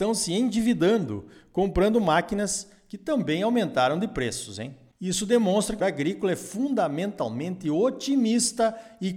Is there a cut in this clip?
yes; 1 cut; at 5.8 s

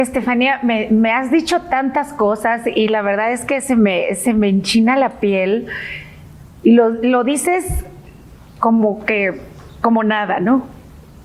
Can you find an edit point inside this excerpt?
no; 0 cuts

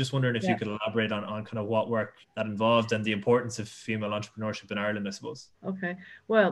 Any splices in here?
yes; 2 cuts; at 2.2 s, 5.5 s

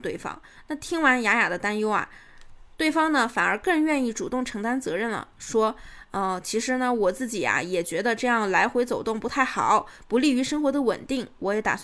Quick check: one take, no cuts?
yes; 0 cuts

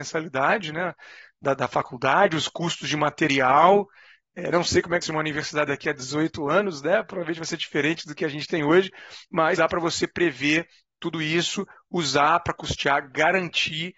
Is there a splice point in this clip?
yes; 2 cuts; at 5.0 s, 9.6 s

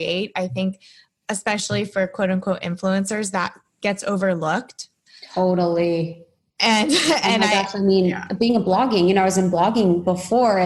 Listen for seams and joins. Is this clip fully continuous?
yes; 0 cuts

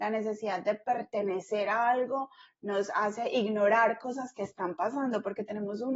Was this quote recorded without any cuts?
yes; 0 cuts

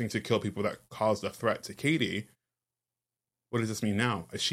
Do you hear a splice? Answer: no; 0 cuts

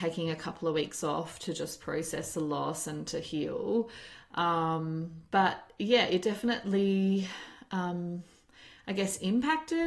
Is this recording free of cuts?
yes; 0 cuts

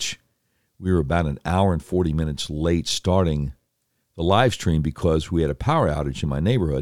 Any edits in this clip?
yes; 1 cut; at 3.8 s

